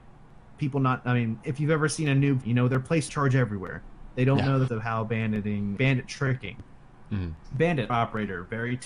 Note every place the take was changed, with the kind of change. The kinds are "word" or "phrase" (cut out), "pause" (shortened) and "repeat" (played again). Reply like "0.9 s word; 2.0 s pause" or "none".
1.4 s word; 2.4 s word; 3.1 s word; 4.7 s word; 5.8 s word; 7.9 s word